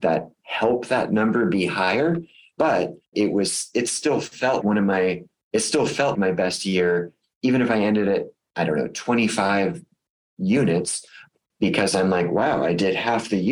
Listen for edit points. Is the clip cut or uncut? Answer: cut